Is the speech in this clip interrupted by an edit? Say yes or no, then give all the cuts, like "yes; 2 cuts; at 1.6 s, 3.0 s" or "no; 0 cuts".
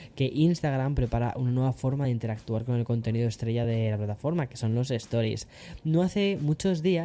no; 0 cuts